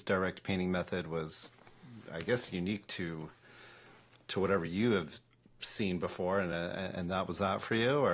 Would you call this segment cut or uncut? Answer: uncut